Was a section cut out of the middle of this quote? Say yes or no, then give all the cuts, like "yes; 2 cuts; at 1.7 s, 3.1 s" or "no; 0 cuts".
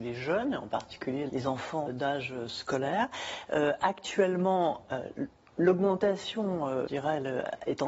yes; 3 cuts; at 1.3 s, 1.9 s, 6.9 s